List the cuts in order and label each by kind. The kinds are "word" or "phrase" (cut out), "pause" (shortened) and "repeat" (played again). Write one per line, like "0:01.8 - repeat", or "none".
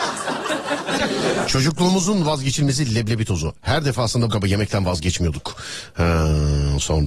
0:04.3 - word